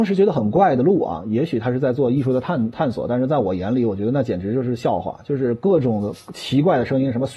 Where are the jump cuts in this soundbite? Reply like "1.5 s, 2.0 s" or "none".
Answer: none

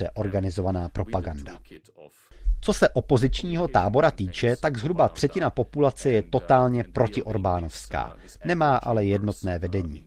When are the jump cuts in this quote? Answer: none

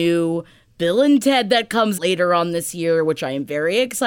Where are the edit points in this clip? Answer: 2.0 s

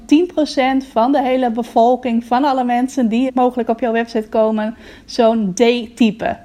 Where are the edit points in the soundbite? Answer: 3.3 s

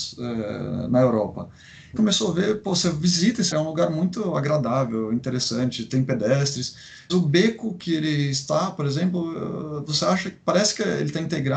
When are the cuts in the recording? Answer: 2.0 s, 3.5 s, 7.1 s

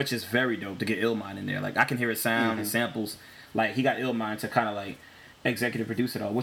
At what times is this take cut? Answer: 5.3 s

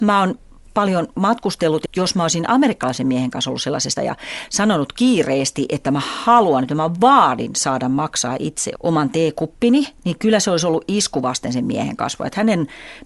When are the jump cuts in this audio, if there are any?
1.9 s, 4.0 s, 8.7 s

